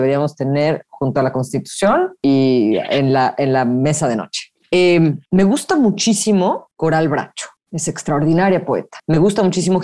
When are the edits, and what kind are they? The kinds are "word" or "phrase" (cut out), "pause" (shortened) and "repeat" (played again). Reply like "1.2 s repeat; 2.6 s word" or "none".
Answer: none

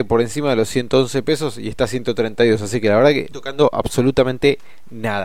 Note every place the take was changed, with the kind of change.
3.3 s phrase

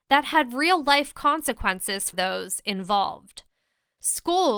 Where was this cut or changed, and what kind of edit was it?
2.1 s word

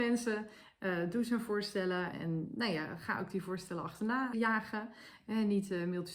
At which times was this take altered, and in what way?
2.1 s word; 4.3 s word

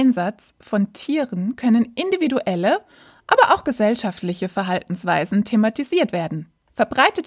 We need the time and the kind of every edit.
none

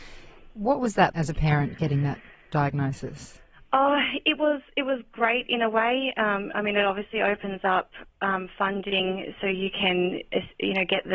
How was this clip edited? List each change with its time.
1.1 s word

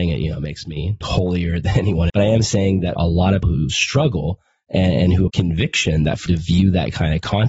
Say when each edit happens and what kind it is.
1.0 s word; 2.1 s word; 2.9 s word; 3.4 s word; 5.3 s word; 6.3 s word

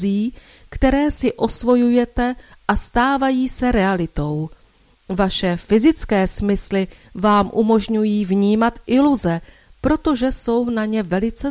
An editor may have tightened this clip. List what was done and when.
none

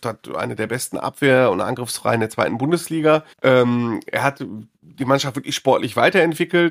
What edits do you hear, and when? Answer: 3.3 s pause; 4.7 s pause

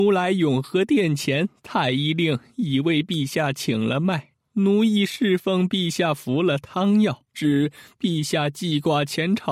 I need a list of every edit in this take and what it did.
7.3 s pause

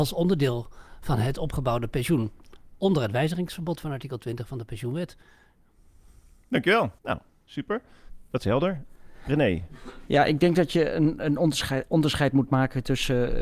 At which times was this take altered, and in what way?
7.0 s pause

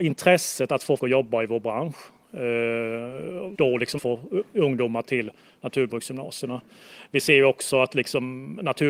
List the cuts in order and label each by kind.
1.0 s word; 3.5 s word; 4.0 s word; 5.0 s word

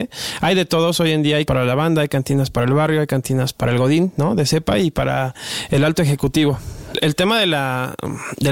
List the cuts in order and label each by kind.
1.5 s word; 3.5 s word

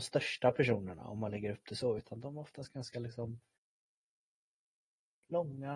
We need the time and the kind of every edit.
none

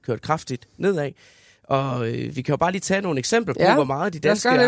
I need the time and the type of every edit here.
none

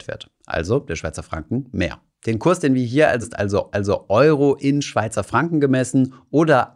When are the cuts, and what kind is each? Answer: 3.2 s word; 3.7 s repeat

